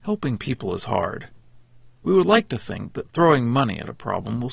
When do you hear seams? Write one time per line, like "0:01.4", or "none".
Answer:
0:02.0